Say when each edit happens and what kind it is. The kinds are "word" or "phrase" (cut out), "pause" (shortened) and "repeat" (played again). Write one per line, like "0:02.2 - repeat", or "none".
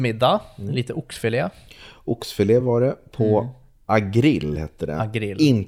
none